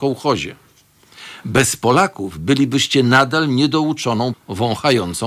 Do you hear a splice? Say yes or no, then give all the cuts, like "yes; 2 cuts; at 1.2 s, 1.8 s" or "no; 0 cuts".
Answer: yes; 1 cut; at 4.3 s